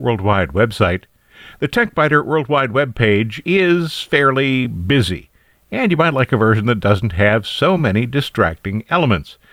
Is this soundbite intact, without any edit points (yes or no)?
yes